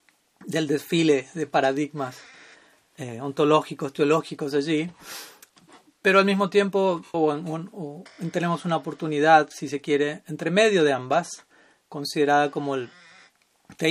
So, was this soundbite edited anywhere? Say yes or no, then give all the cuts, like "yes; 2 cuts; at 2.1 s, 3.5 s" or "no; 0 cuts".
yes; 1 cut; at 7.1 s